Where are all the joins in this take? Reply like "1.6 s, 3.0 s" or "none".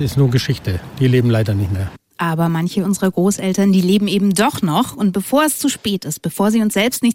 none